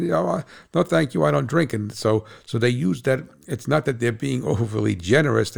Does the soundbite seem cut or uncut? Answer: uncut